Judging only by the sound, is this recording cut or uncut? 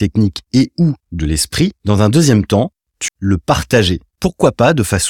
cut